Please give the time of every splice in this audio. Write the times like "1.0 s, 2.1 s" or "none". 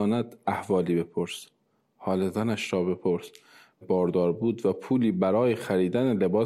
3.8 s